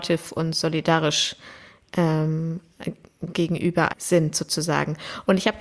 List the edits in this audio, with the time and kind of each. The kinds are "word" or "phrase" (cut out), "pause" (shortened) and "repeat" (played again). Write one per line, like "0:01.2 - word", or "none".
0:03.9 - word